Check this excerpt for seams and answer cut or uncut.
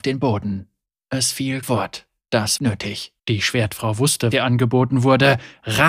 cut